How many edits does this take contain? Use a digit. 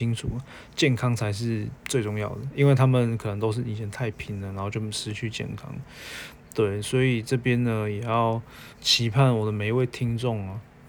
2